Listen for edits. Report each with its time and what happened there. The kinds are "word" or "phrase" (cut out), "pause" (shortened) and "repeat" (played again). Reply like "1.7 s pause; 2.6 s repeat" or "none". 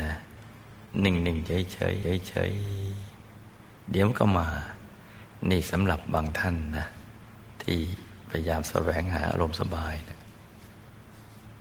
2.0 s repeat